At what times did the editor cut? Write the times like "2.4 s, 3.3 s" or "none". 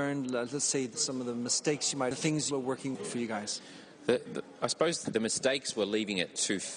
2.1 s, 2.5 s, 2.9 s, 4.3 s, 5.0 s